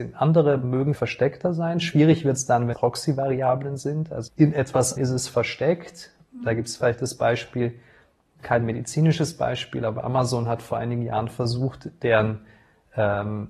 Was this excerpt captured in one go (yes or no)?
no